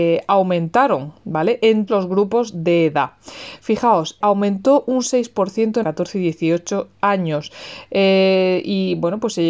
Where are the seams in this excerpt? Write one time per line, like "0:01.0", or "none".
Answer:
0:01.9
0:04.2
0:05.8